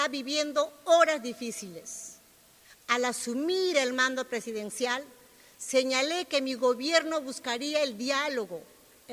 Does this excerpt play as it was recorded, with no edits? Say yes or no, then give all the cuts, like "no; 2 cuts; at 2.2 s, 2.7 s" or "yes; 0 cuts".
yes; 0 cuts